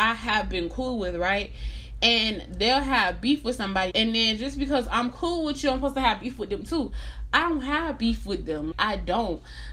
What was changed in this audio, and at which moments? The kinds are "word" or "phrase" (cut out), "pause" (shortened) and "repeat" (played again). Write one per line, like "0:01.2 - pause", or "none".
0:03.9 - phrase
0:08.7 - word